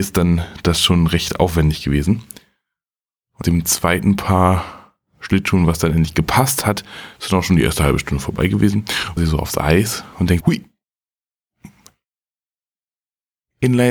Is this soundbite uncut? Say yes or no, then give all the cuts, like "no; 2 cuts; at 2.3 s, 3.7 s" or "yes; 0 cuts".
no; 4 cuts; at 3.4 s, 7.1 s, 9.2 s, 10.4 s